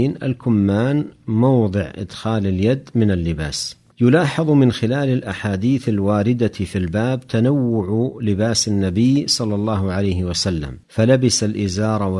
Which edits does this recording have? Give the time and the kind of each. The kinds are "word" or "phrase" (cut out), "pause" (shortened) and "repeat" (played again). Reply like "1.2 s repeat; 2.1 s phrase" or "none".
3.9 s pause; 10.8 s pause